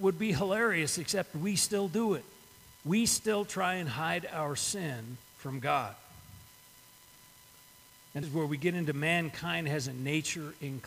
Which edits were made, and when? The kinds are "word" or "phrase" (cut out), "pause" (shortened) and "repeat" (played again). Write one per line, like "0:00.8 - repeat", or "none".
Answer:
0:02.8 - pause
0:05.3 - pause
0:08.2 - word